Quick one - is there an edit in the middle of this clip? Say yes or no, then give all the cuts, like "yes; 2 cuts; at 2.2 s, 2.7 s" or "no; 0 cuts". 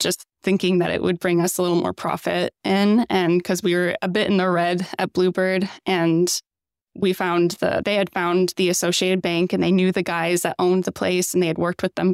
no; 0 cuts